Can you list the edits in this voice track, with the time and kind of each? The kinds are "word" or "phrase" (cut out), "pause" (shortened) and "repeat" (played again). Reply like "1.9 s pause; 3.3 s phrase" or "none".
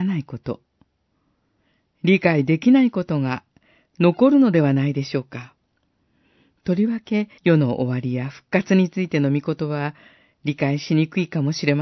7.4 s pause